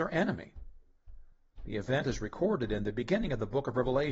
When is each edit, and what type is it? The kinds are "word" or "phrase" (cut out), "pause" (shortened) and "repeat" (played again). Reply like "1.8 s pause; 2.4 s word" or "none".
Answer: none